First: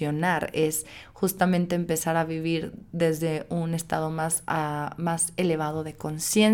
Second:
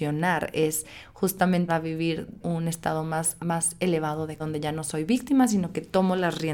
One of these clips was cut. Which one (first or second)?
second